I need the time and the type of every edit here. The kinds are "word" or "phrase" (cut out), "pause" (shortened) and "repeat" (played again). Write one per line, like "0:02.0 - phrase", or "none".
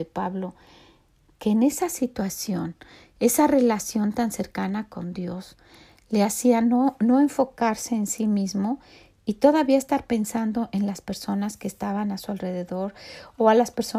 none

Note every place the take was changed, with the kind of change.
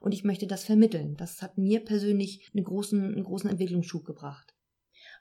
0:02.5 - pause

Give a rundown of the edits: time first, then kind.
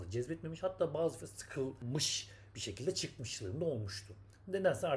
0:01.2 - word

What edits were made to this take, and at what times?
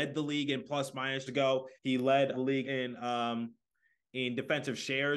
0:01.3 - phrase
0:01.8 - pause
0:02.3 - word
0:02.6 - word

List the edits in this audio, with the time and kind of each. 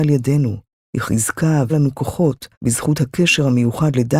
0:01.7 - word
0:02.5 - pause

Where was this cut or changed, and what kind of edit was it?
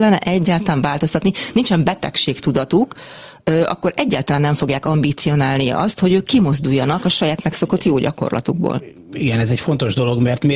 none

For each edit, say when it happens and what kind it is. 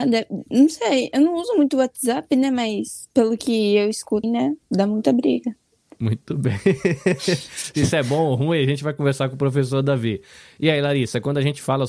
0:04.2 - word
0:04.6 - pause

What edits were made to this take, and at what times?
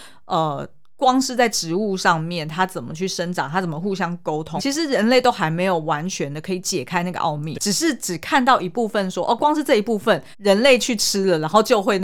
0:04.6 - word
0:07.5 - word
0:10.3 - pause

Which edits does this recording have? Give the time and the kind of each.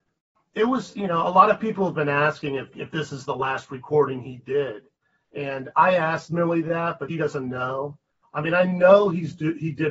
0:02.7 - word
0:07.1 - word

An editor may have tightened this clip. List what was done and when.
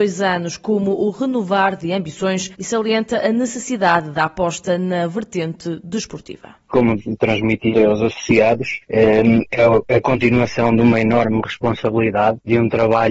0:02.5 - pause
0:06.6 - pause

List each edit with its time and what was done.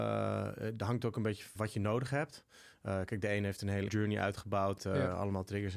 0:01.5 - word
0:03.9 - word
0:04.8 - word

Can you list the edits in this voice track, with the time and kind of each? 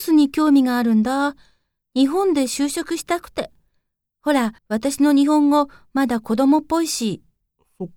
0:04.6 - pause

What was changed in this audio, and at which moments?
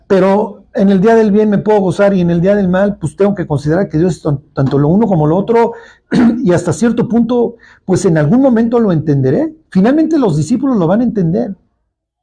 none

